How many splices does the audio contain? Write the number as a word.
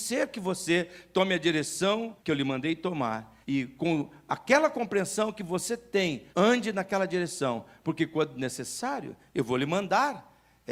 three